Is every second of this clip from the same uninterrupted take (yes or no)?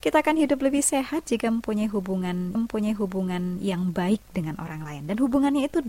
no